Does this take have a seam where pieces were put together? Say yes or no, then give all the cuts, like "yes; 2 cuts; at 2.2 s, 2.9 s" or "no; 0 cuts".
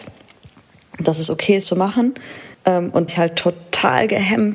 yes; 3 cuts; at 1.6 s, 2.5 s, 3.1 s